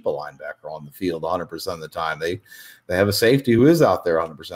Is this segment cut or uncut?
uncut